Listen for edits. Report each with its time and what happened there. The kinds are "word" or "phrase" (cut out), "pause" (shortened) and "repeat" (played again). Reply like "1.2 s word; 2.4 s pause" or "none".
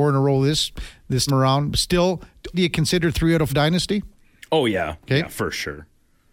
1.3 s word; 2.5 s word; 3.5 s word